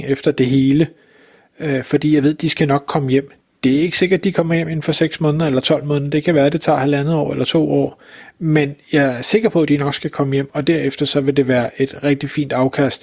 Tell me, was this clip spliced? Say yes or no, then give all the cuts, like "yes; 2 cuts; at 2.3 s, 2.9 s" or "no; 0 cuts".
no; 0 cuts